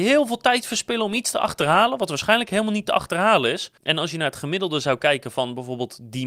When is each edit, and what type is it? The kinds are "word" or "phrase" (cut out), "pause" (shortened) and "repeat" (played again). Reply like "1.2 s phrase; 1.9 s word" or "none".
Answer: 3.8 s pause